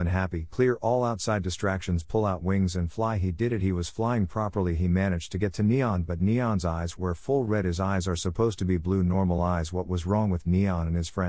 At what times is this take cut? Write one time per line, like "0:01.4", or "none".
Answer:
none

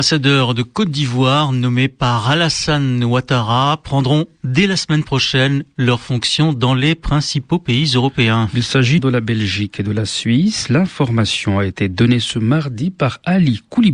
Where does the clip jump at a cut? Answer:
0:09.0

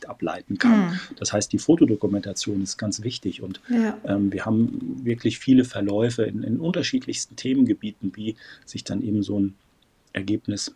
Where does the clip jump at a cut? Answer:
0:02.8

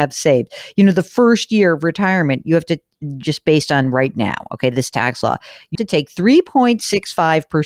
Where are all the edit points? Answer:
0:05.7

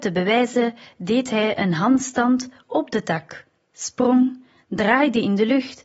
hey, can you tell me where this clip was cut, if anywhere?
none

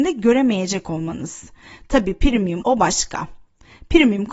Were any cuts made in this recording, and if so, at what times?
0:02.6

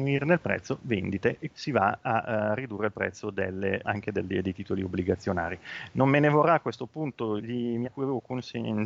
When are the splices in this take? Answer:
0:01.5
0:02.0
0:03.8
0:07.4
0:07.8

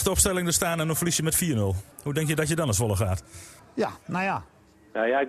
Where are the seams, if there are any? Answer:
0:01.9
0:03.6

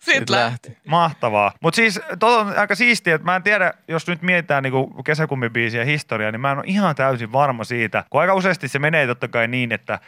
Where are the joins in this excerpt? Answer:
0:01.6
0:08.1

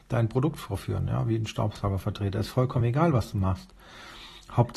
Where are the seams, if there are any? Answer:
none

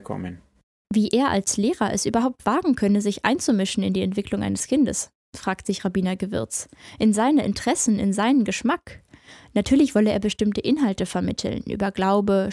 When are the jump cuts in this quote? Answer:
none

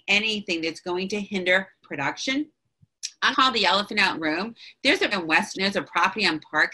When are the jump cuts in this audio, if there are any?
0:01.8
0:03.3
0:04.2
0:05.1
0:05.5

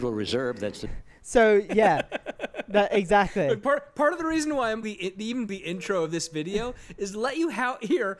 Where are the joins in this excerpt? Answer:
0:04.8
0:05.5

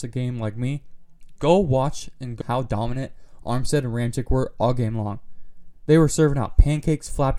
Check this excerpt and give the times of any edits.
0:02.4

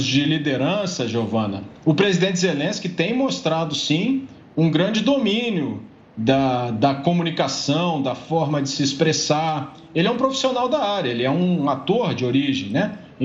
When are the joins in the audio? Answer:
none

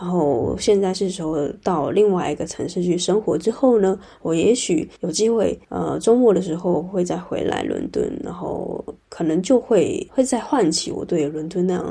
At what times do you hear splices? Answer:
0:05.0

